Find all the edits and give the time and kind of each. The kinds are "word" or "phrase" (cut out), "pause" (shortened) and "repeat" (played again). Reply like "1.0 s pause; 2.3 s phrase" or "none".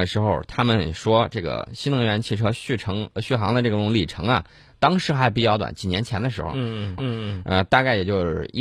7.0 s repeat